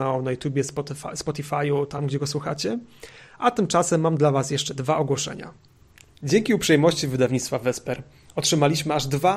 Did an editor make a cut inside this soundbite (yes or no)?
no